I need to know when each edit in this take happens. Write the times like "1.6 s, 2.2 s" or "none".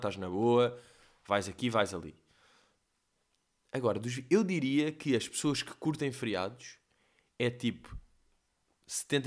none